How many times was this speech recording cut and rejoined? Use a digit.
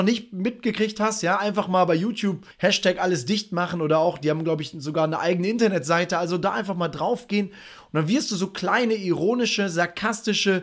1